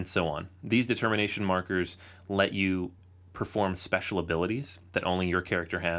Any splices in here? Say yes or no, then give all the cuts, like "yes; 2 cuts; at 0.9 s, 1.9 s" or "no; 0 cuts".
no; 0 cuts